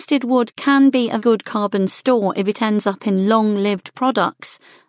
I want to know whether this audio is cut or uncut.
cut